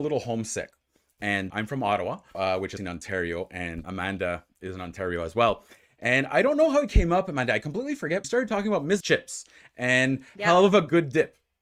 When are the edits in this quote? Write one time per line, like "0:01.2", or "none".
0:01.5
0:02.3
0:02.8
0:03.8
0:08.2
0:09.0